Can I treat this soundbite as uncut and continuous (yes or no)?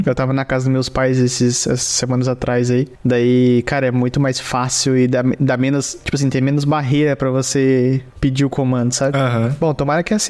yes